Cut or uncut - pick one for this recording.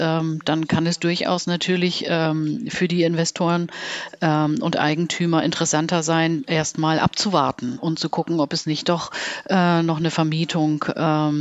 uncut